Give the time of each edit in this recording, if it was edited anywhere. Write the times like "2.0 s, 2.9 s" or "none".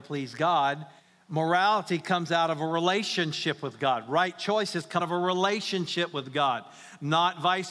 1.0 s, 5.0 s